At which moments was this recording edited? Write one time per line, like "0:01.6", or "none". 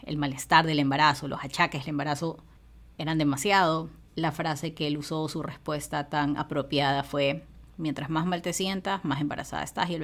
0:02.9
0:04.1

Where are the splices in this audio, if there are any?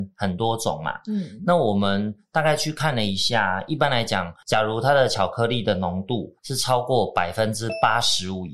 0:06.4

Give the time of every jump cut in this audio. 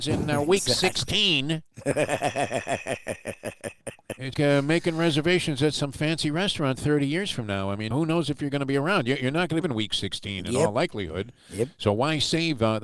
0:04.3
0:07.9
0:09.6

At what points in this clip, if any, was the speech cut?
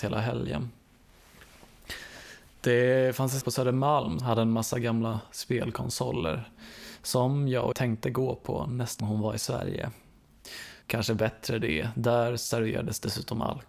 0:03.4
0:04.2
0:07.7
0:09.0
0:10.8

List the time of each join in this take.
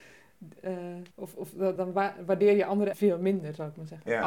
0:01.1
0:01.8
0:02.9

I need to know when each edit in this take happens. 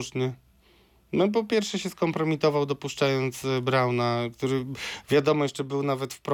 none

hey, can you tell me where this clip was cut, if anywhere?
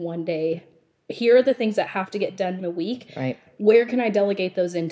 0:02.6

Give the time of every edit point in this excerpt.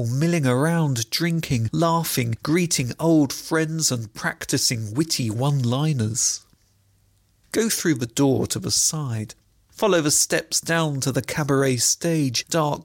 none

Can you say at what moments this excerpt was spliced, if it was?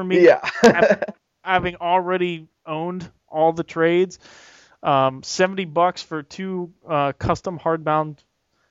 none

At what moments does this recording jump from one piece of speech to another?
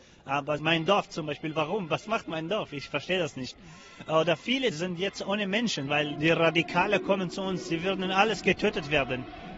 0:04.7
0:06.1

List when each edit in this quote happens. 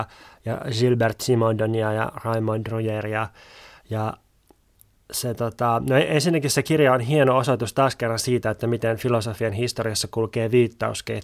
none

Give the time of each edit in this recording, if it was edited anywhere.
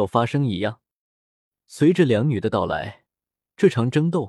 none

